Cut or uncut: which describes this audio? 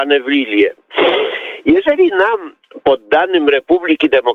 uncut